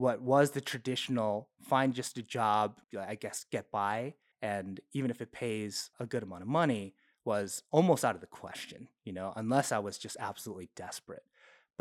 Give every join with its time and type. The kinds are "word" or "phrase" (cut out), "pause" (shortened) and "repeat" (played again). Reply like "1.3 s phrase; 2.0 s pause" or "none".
2.8 s word; 4.3 s pause; 5.9 s word